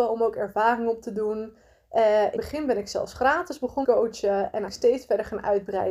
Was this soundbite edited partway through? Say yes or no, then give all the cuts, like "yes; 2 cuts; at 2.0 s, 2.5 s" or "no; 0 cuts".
yes; 3 cuts; at 2.4 s, 3.8 s, 4.7 s